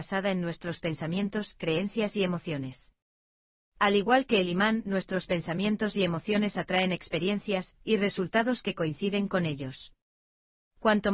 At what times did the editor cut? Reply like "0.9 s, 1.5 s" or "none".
none